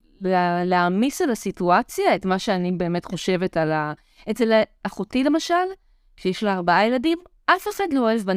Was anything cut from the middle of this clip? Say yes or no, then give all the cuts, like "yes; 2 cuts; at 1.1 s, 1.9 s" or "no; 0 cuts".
no; 0 cuts